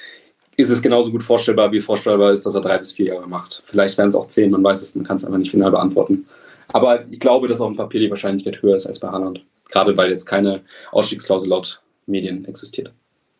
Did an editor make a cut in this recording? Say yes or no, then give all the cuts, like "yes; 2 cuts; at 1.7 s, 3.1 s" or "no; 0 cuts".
yes; 1 cut; at 4.9 s